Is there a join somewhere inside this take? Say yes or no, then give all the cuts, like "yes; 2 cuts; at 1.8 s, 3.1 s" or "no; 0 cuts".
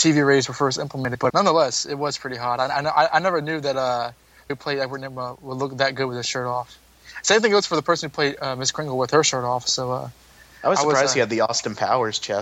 yes; 2 cuts; at 1.3 s, 4.5 s